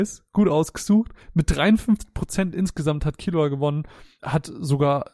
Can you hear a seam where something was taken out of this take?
no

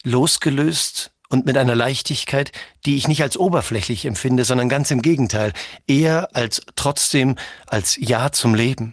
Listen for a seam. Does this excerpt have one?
yes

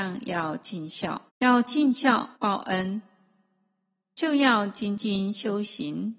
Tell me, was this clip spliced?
yes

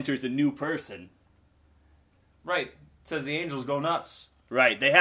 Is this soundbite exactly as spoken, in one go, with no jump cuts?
yes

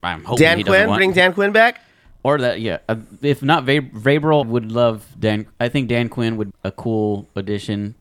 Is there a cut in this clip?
yes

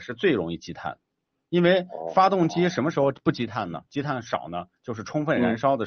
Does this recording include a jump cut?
no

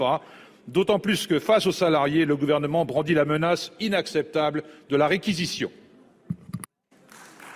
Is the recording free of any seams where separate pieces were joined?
yes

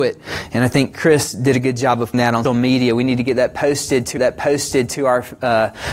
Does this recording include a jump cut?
yes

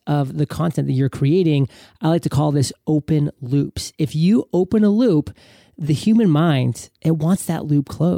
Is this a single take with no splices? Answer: yes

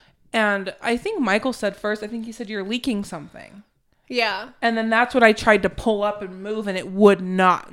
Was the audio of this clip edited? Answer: no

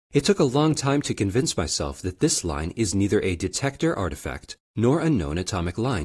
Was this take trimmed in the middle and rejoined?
no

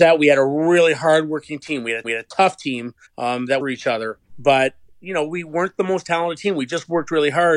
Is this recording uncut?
no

